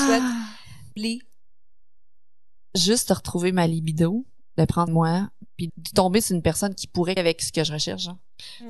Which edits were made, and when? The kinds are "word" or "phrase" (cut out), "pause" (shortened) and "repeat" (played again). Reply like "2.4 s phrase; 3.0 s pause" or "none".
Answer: 1.0 s word; 4.9 s word; 5.7 s word; 7.2 s word